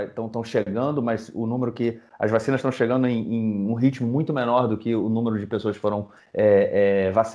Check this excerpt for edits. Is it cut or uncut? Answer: uncut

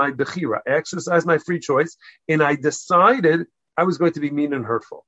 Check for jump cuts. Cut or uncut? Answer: uncut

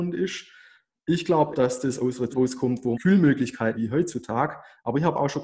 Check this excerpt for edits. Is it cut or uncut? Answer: cut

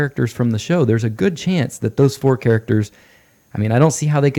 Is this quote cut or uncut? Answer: uncut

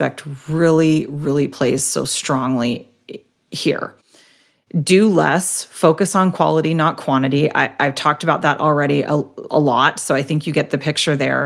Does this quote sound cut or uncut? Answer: uncut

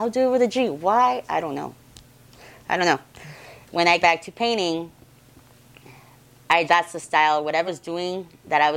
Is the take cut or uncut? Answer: cut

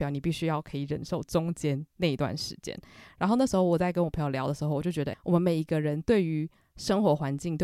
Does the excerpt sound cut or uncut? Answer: cut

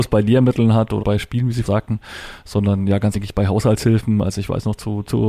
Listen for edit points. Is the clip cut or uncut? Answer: cut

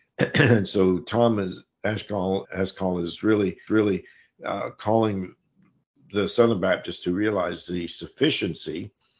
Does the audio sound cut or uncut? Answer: cut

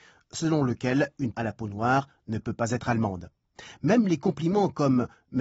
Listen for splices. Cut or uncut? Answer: cut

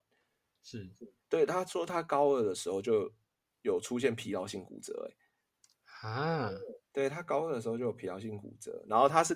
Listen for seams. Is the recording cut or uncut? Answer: uncut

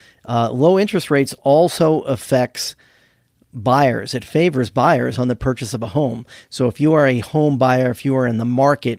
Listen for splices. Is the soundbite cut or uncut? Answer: uncut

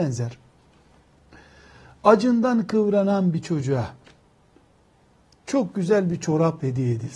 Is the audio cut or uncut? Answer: uncut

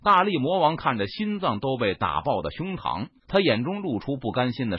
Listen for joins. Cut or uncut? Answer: cut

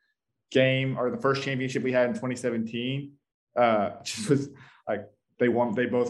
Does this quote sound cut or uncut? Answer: uncut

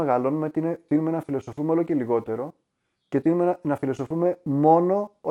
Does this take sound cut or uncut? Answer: uncut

